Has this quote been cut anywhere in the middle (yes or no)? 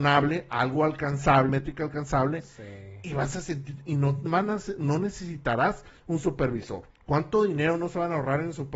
yes